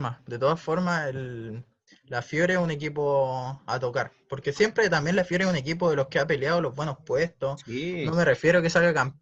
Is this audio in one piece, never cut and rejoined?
yes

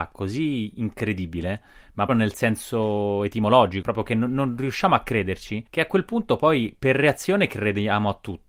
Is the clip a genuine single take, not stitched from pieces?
no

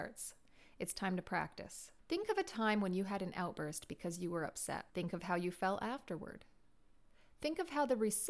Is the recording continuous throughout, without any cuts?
no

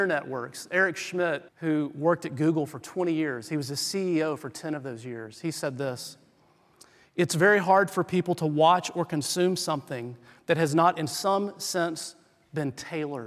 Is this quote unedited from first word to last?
no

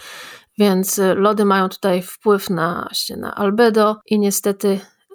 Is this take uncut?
no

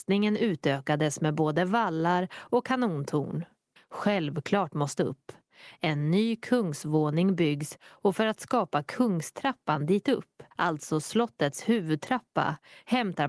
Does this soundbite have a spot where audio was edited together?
yes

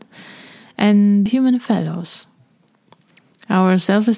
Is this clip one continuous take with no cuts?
no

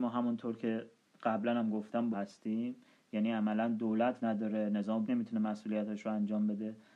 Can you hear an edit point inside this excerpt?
yes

